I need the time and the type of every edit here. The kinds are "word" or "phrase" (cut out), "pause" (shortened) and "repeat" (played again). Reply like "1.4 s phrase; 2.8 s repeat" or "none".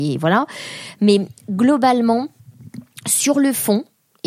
none